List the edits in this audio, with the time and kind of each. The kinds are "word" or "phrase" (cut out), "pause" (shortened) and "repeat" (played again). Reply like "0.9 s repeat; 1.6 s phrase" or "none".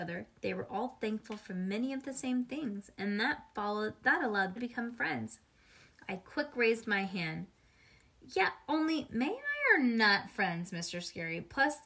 4.6 s word